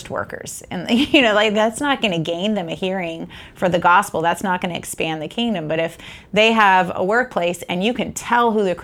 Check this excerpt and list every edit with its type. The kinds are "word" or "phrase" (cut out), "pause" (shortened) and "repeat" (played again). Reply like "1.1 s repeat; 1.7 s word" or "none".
none